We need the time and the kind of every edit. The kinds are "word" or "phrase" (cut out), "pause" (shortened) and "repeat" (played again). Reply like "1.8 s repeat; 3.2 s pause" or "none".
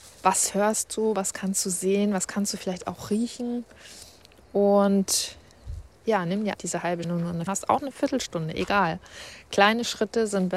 5.9 s pause; 6.5 s word; 7.0 s phrase; 7.5 s word